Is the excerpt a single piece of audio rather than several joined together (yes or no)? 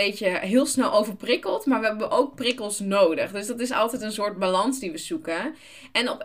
yes